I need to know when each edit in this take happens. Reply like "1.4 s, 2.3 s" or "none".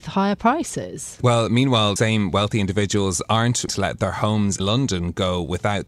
2.0 s, 3.7 s, 4.6 s